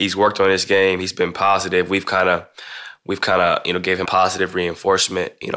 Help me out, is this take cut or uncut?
cut